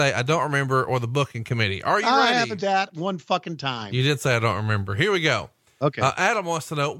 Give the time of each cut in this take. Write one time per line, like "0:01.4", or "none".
0:02.6